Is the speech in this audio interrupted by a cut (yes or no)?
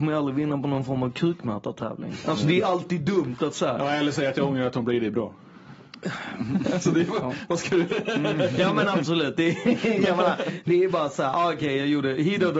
no